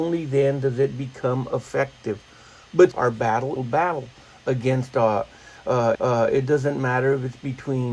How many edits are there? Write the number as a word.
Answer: three